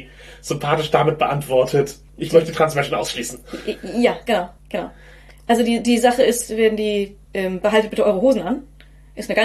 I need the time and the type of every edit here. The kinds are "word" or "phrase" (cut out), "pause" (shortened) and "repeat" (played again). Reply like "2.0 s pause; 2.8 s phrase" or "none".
4.6 s pause; 7.2 s pause